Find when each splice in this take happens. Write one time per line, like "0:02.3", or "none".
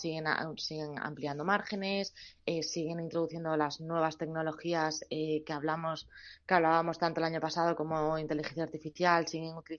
none